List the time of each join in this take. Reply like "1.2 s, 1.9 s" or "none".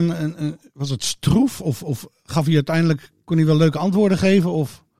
none